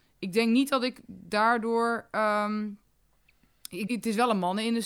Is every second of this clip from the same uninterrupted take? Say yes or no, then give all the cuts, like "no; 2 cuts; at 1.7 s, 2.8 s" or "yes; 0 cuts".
no; 1 cut; at 3.9 s